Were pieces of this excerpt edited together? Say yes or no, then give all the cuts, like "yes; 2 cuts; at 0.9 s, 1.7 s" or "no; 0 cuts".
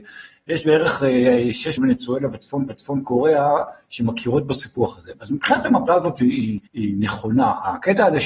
yes; 4 cuts; at 1.8 s, 2.7 s, 5.9 s, 6.7 s